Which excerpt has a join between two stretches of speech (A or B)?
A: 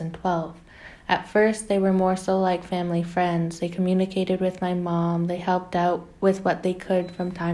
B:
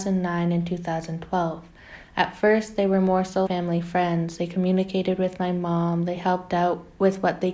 B